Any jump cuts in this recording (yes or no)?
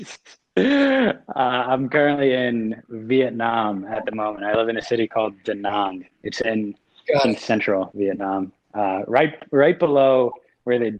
no